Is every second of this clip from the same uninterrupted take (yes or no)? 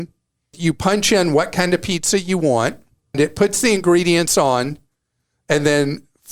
yes